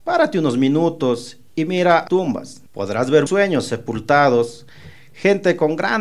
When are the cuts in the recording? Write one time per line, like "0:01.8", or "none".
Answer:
0:01.5
0:02.1
0:02.7
0:03.3